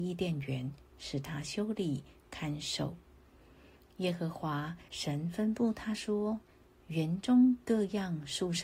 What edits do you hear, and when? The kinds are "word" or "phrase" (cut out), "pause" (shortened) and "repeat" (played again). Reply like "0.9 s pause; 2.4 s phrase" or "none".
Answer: 4.9 s pause; 6.5 s pause